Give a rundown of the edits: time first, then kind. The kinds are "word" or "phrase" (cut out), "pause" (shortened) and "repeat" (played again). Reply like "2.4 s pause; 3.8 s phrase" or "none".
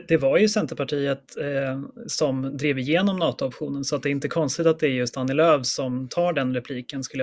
none